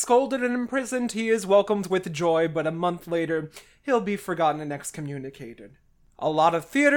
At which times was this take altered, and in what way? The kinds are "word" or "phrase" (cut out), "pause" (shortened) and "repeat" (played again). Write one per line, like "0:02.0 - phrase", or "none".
none